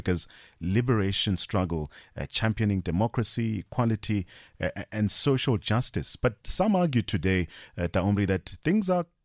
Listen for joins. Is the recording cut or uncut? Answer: uncut